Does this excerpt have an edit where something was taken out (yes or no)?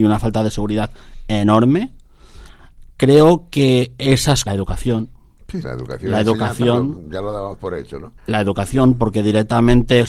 yes